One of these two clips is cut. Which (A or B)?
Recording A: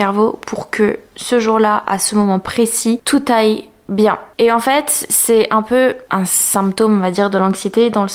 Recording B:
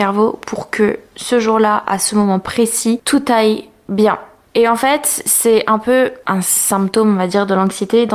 A